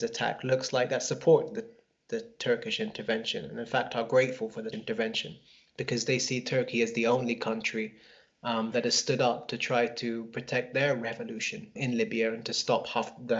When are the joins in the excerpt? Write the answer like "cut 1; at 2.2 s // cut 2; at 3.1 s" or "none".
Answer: cut 1; at 4.7 s // cut 2; at 11.8 s